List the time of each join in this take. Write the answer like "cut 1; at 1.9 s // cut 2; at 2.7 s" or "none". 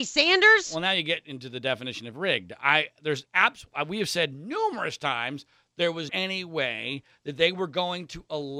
cut 1; at 6.1 s